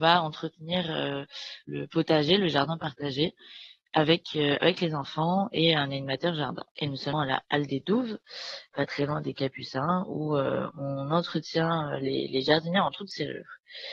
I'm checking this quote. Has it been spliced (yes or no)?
yes